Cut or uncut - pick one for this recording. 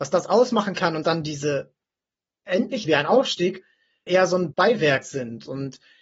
cut